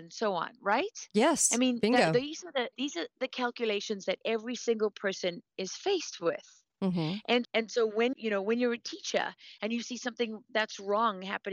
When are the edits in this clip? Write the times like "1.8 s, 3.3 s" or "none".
2.7 s, 7.4 s, 8.1 s